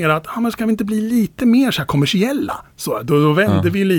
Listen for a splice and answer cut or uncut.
uncut